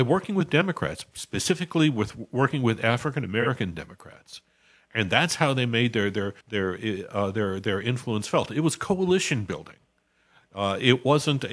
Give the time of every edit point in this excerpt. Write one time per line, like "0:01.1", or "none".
0:06.4